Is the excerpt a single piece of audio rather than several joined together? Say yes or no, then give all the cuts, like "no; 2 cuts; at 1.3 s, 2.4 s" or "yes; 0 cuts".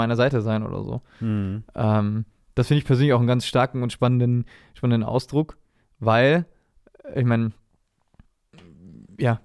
yes; 0 cuts